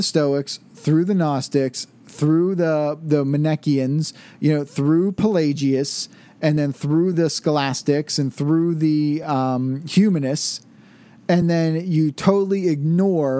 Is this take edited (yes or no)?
no